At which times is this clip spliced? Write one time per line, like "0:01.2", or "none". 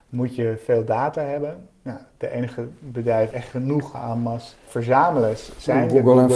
0:03.3
0:03.9
0:04.7